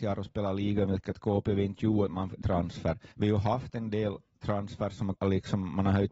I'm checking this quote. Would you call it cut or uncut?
cut